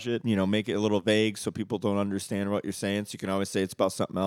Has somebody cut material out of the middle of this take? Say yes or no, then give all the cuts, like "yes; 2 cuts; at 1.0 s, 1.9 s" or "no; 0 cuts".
no; 0 cuts